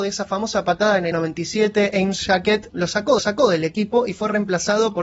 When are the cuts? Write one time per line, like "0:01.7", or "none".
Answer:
0:01.1
0:02.7
0:03.2

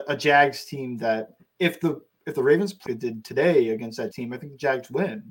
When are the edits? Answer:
0:02.1
0:02.9
0:04.1

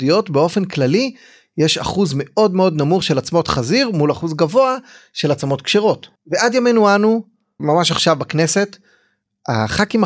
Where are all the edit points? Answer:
0:06.2

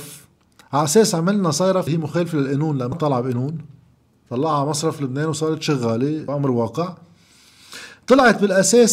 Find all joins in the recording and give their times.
0:01.9
0:02.9
0:06.3

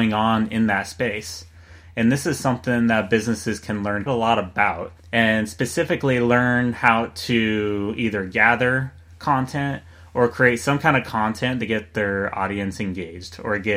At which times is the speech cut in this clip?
0:04.1
0:05.0

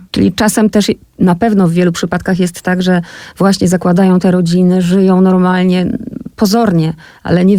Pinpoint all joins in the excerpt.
none

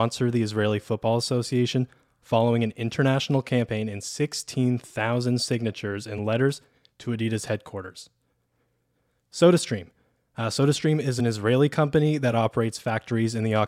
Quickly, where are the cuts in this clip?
none

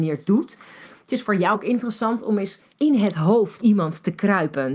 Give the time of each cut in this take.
0:01.5
0:02.7
0:03.6

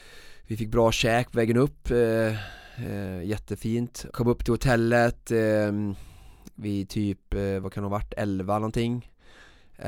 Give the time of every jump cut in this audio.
0:04.1

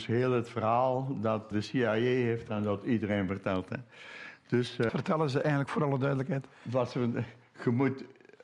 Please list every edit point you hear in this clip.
0:01.5
0:02.5
0:04.9

